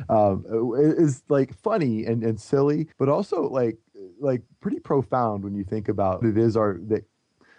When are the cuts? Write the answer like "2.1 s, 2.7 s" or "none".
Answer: 2.9 s, 4.5 s, 6.2 s